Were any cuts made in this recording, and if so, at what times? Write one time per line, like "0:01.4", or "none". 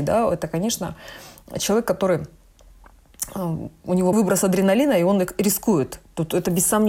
0:04.1